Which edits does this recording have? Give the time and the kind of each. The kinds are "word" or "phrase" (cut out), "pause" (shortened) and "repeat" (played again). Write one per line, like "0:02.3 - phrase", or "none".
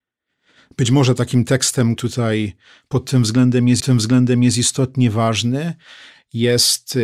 0:02.0 - word
0:03.8 - repeat

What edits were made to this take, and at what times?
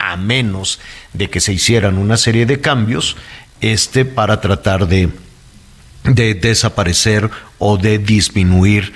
none

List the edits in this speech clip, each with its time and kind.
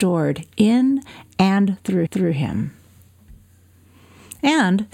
0:02.1 - repeat

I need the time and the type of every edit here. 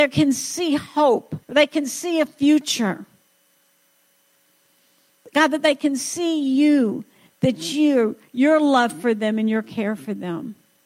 0:01.4 - pause

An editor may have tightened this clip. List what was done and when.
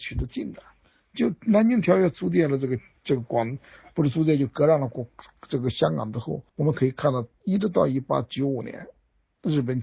0:06.5 - pause

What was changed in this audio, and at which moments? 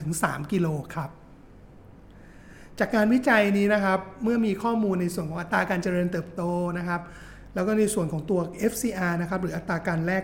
none

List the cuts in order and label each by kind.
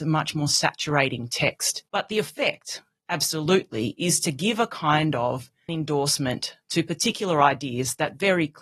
0:01.9 - pause
0:05.7 - word

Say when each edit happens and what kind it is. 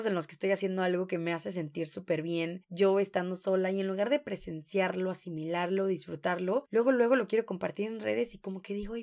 none

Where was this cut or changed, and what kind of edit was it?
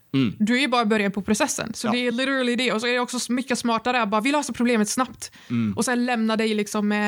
none

